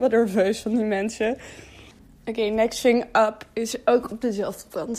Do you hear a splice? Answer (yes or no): no